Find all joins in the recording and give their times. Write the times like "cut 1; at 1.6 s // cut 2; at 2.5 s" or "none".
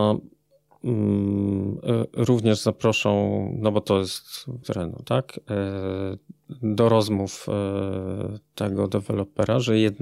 cut 1; at 4.6 s